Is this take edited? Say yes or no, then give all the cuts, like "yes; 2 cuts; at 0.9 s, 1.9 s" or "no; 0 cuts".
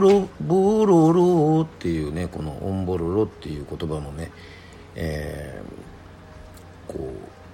no; 0 cuts